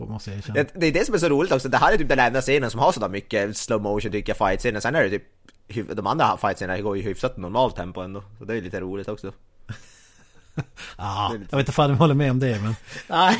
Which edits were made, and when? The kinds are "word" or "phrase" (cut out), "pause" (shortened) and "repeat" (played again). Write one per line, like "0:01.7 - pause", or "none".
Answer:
none